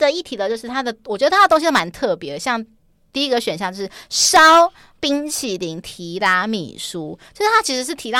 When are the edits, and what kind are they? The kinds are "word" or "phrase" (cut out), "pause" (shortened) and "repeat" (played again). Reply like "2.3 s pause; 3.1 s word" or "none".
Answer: none